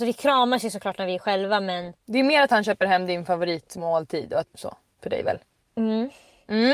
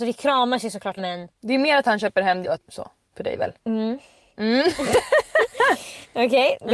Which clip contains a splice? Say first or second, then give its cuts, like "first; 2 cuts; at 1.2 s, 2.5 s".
second; 3 cuts; at 1.0 s, 2.4 s, 3.6 s